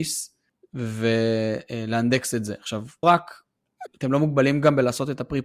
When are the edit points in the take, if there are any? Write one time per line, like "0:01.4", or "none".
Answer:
0:03.0
0:03.9